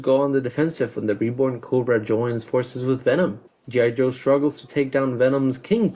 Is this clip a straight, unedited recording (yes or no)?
no